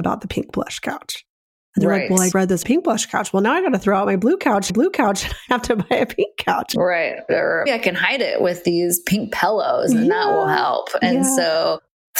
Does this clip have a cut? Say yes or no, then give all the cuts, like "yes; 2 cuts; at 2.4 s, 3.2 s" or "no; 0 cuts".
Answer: yes; 5 cuts; at 2.3 s, 2.6 s, 4.7 s, 5.5 s, 7.7 s